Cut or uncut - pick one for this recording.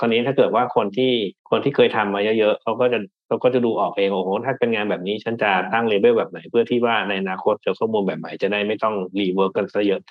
cut